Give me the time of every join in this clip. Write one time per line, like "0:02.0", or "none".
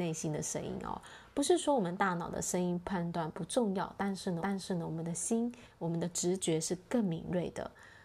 0:04.4

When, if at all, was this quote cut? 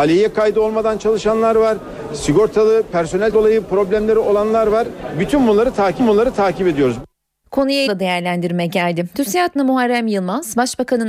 0:03.3
0:06.0
0:07.9
0:09.6

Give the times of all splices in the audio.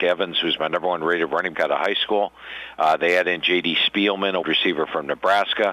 0:01.5
0:04.4

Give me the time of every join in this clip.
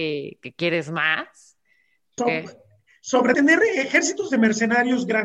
0:02.2
0:03.3

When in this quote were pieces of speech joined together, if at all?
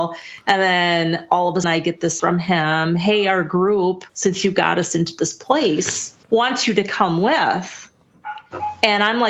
0:01.6
0:02.2
0:04.1
0:06.2

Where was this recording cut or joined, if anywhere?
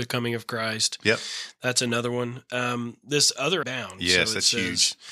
0:03.6

